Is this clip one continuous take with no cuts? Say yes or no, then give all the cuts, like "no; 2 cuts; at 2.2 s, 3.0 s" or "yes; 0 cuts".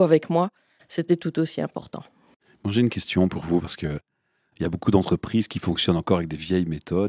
yes; 0 cuts